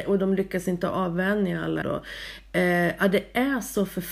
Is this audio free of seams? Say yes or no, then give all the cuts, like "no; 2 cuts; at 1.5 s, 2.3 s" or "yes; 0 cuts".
no; 1 cut; at 1.8 s